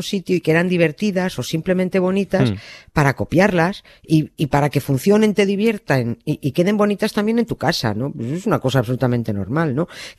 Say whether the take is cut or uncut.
uncut